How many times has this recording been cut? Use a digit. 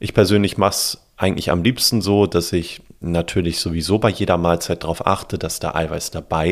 0